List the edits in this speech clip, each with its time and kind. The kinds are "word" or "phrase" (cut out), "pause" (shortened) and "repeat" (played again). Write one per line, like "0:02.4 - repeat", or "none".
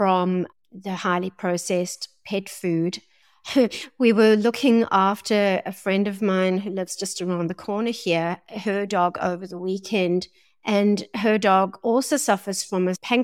none